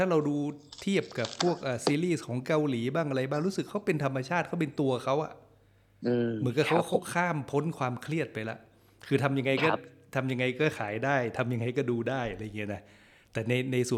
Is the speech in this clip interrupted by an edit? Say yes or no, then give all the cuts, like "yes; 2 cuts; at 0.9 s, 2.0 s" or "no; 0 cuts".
no; 0 cuts